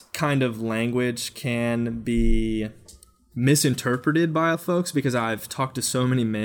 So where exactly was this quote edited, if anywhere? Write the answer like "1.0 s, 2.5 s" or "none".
4.5 s